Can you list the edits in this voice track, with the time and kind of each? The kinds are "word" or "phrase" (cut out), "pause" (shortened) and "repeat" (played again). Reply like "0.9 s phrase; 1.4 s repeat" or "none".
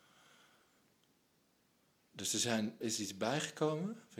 2.8 s word